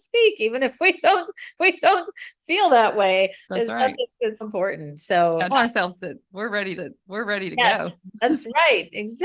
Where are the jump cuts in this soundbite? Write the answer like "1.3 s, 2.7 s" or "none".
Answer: 1.6 s, 3.4 s, 4.4 s, 5.5 s, 6.7 s